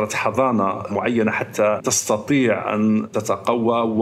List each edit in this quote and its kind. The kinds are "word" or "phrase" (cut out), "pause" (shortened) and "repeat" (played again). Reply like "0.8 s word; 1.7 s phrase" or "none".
none